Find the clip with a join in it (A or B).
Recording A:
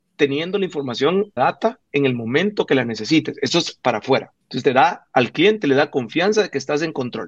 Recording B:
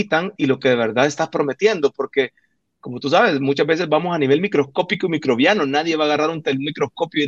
A